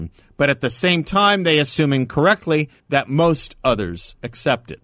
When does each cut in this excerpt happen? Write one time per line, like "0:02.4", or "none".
0:02.8